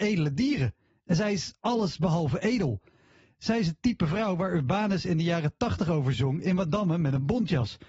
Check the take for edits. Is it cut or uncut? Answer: uncut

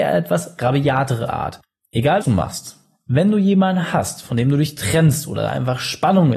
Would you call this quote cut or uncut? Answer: cut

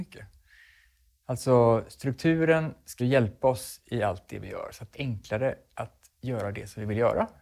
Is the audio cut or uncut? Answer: cut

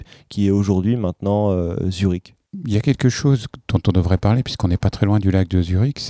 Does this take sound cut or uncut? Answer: uncut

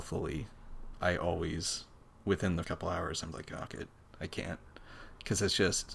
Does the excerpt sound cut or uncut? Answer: cut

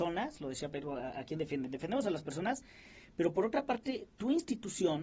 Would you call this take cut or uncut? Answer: uncut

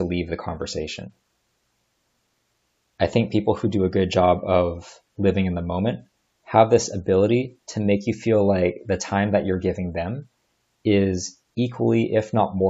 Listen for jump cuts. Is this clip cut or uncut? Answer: uncut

